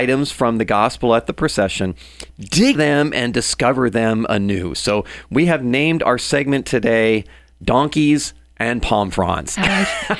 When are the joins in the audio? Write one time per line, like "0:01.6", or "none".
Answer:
0:02.7